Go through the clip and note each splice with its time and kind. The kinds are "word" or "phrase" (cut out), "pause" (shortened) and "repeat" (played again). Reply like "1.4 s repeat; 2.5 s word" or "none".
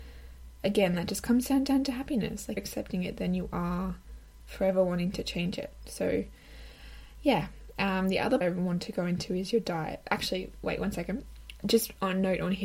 1.7 s repeat; 2.6 s phrase; 8.4 s phrase